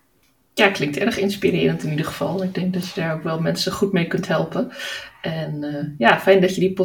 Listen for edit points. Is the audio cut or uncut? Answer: uncut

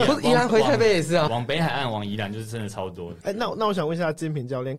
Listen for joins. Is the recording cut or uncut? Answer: cut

